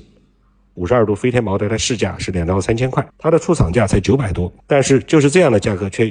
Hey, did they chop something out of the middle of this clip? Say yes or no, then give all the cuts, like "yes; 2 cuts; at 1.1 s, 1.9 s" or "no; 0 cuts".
yes; 2 cuts; at 3.1 s, 4.6 s